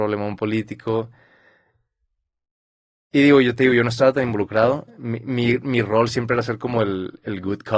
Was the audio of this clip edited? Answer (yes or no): no